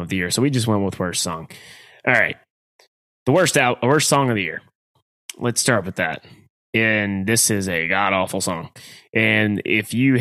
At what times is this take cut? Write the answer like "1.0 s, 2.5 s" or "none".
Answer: none